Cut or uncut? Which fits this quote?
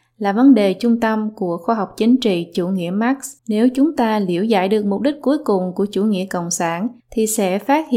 cut